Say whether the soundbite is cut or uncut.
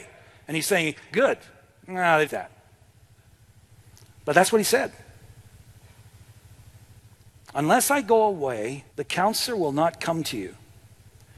cut